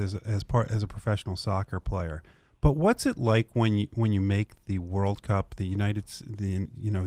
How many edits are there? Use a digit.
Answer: 0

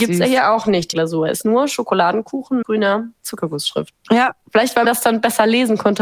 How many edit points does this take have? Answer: 4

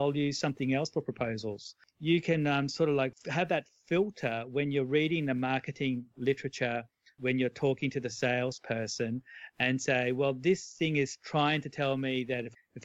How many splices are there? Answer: 0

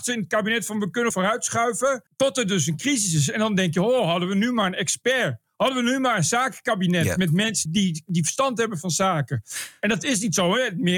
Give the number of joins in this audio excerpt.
3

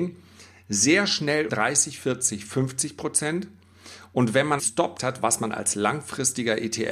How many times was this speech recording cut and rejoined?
3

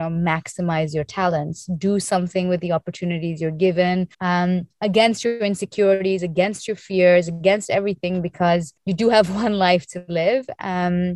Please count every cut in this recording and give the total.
2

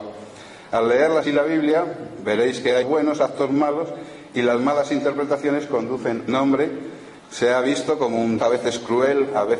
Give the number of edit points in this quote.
5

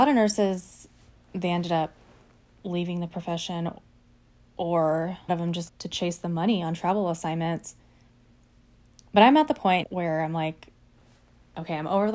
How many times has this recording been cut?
3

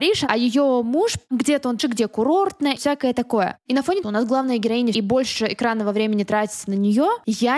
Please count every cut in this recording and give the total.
4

